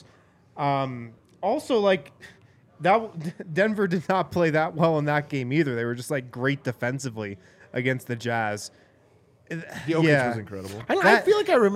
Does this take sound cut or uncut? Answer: uncut